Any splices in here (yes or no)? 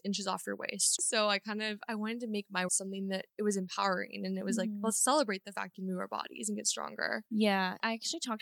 yes